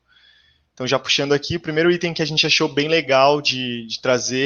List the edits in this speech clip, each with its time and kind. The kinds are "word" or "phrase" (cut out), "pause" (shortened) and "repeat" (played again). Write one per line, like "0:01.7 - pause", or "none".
none